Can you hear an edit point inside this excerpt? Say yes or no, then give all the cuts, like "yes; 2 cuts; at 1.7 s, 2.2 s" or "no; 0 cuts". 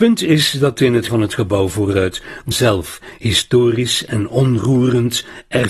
yes; 2 cuts; at 1.1 s, 2.5 s